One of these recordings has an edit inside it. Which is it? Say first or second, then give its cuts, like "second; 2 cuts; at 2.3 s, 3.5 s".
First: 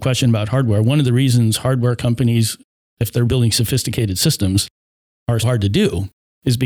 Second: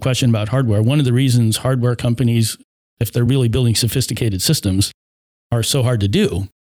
first; 2 cuts; at 3.3 s, 5.4 s